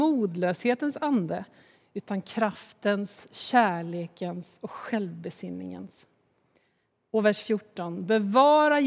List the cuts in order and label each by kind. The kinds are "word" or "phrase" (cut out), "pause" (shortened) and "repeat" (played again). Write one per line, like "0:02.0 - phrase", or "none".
none